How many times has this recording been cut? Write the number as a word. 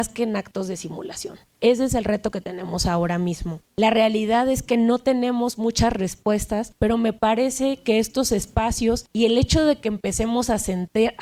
one